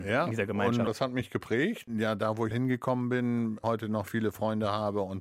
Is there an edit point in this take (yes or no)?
yes